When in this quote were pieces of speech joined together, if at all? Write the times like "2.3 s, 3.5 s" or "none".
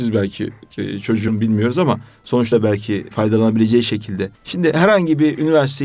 1.3 s, 2.5 s, 3.1 s, 4.3 s